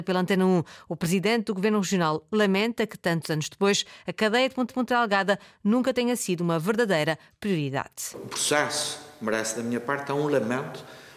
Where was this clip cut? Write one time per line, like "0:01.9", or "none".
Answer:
0:04.7